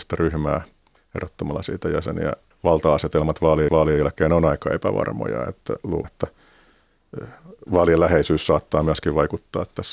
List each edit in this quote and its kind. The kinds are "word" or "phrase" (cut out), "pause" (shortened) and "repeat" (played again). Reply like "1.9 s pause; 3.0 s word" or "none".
2.5 s phrase; 3.7 s repeat; 6.0 s word